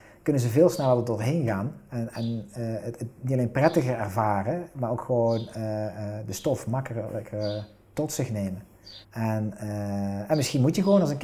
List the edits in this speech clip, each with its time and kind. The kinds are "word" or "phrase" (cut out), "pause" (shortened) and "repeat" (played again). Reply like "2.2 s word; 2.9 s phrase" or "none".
9.0 s pause